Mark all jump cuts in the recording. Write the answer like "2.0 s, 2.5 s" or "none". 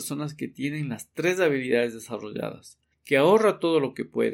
2.9 s